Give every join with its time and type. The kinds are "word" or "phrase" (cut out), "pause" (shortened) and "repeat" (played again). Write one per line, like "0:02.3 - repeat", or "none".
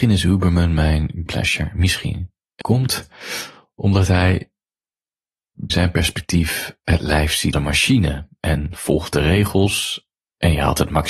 0:01.3 - word
0:02.6 - word
0:05.7 - word
0:07.5 - word